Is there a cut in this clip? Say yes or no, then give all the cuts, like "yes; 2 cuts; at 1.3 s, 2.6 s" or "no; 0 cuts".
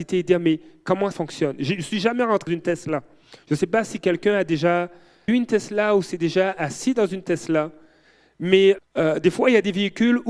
yes; 4 cuts; at 1.1 s, 2.5 s, 5.3 s, 8.8 s